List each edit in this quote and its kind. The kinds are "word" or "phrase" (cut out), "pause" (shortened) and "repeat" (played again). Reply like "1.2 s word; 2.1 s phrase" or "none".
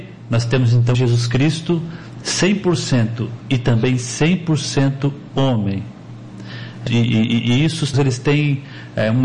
0.9 s word; 3.4 s word; 6.9 s word; 7.9 s word